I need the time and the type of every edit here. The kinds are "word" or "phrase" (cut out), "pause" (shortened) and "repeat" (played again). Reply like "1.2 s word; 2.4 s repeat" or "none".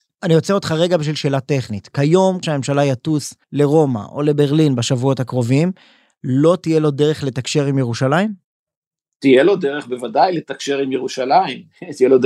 2.4 s word; 3.4 s pause